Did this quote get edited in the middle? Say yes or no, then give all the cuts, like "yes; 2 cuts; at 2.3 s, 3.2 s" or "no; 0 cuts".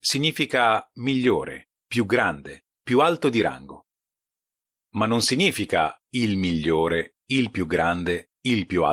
yes; 2 cuts; at 1.7 s, 2.7 s